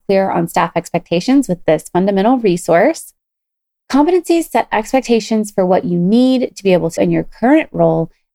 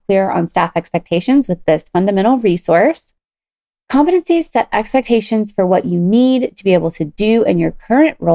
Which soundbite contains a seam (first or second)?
first